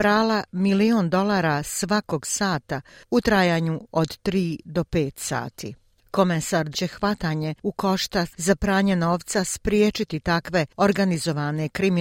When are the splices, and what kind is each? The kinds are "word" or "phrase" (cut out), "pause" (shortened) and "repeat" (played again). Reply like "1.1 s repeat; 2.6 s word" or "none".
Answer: 6.7 s phrase; 8.3 s phrase